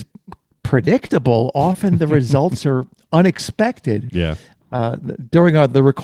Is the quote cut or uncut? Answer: uncut